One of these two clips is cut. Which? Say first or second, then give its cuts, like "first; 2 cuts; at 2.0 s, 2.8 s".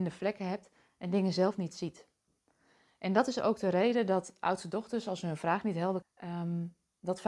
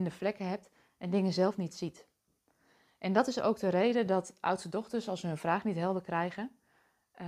first; 1 cut; at 6.0 s